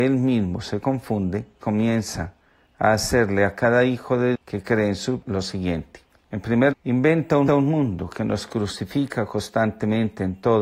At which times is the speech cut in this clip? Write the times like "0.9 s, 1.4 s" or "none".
1.6 s, 4.3 s, 5.2 s, 6.1 s, 6.7 s, 7.5 s